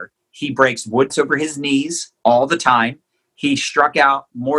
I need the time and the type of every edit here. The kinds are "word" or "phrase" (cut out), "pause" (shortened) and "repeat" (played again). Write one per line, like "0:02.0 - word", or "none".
0:01.1 - word